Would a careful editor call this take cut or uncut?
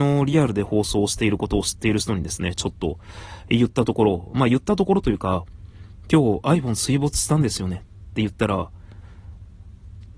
uncut